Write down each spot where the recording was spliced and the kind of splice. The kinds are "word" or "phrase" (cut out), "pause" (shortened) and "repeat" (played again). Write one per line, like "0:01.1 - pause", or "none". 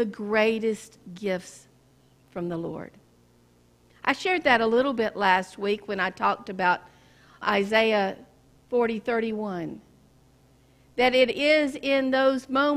0:07.4 - word